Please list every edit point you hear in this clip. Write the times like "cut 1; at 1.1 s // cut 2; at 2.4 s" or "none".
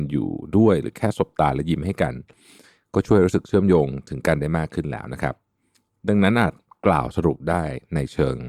none